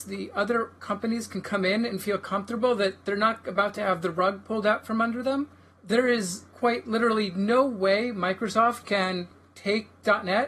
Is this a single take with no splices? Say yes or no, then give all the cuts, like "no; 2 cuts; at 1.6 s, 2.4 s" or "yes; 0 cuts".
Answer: yes; 0 cuts